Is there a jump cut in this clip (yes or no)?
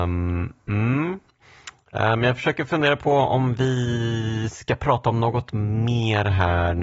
no